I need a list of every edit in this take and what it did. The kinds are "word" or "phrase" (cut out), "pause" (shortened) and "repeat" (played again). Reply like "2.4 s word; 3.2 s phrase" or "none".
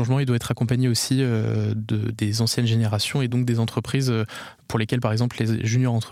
none